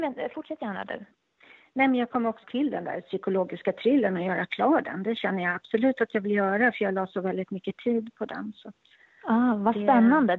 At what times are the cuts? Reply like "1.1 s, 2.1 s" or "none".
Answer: 2.4 s